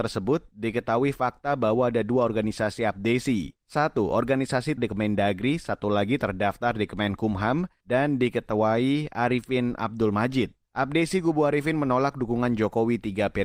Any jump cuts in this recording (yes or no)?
yes